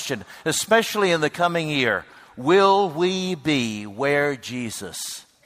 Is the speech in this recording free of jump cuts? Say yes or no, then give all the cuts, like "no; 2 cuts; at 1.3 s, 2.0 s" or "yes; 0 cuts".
yes; 0 cuts